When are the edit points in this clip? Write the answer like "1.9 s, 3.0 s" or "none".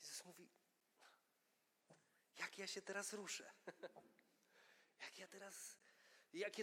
none